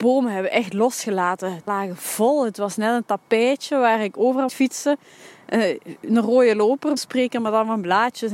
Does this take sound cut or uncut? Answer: cut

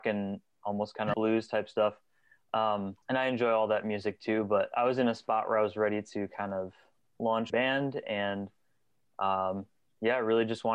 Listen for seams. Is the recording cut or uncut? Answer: cut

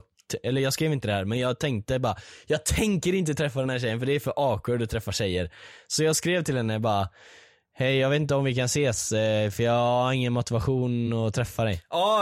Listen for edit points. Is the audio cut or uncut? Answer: uncut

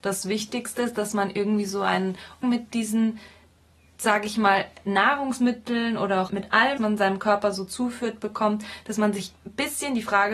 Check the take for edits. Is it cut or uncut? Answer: cut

